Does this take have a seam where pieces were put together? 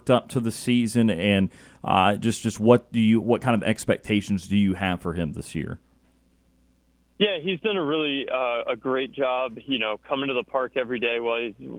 no; 0 cuts

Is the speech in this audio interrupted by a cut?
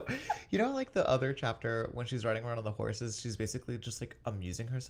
no; 0 cuts

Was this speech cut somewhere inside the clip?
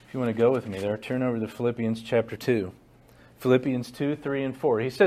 no; 0 cuts

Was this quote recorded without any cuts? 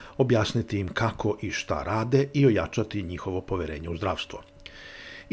yes; 0 cuts

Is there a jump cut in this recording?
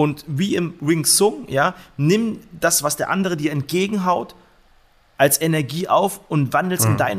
no; 0 cuts

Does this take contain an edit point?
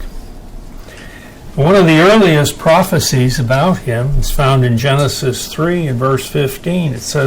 no; 0 cuts

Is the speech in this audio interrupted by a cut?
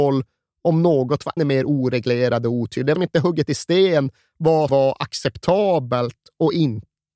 yes; 3 cuts; at 1.4 s, 2.9 s, 4.7 s

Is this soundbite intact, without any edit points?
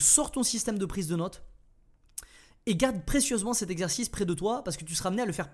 yes; 0 cuts

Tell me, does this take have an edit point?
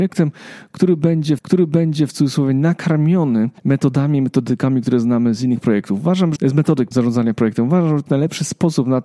yes; 5 cuts; at 1.4 s, 3.6 s, 6.4 s, 6.9 s, 8.1 s

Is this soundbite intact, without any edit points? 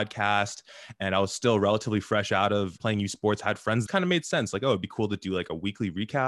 no; 2 cuts; at 2.8 s, 3.9 s

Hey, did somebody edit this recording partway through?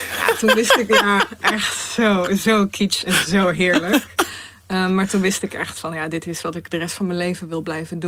no; 0 cuts

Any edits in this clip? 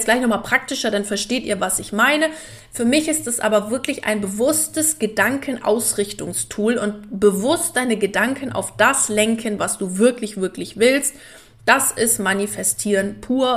no; 0 cuts

